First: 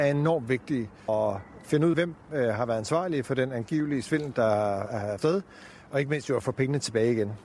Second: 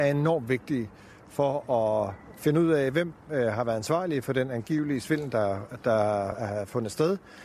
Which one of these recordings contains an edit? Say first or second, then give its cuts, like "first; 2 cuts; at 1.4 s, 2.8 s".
first; 4 cuts; at 1.1 s, 1.9 s, 4.3 s, 5.2 s